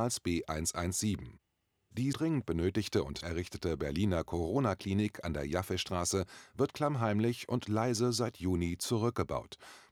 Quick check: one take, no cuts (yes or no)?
no